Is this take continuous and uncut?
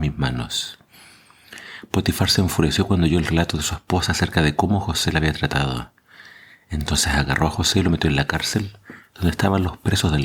yes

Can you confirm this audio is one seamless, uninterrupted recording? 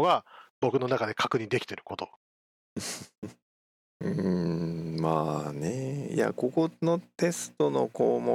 yes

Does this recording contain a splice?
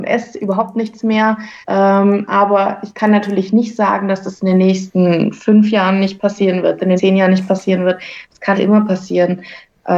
yes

